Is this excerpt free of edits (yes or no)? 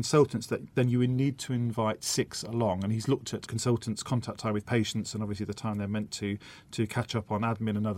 yes